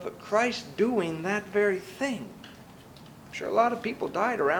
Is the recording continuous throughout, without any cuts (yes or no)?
yes